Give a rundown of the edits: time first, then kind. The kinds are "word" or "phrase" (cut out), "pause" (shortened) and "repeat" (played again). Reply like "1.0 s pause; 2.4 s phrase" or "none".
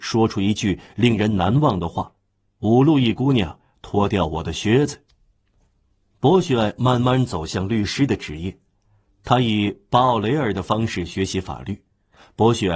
2.2 s pause